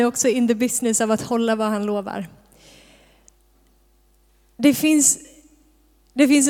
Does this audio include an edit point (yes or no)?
no